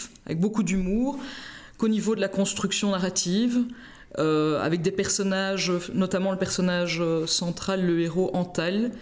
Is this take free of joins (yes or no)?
yes